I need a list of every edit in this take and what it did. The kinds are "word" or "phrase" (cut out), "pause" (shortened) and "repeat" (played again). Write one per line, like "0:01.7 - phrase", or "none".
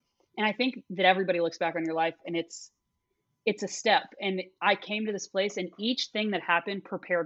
none